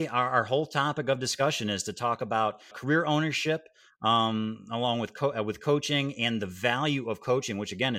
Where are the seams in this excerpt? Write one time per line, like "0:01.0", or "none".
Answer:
0:02.7